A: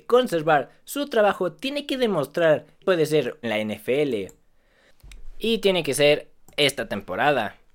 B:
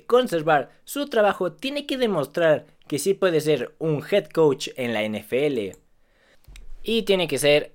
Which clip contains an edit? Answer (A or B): A